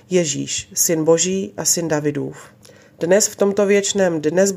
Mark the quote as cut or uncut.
cut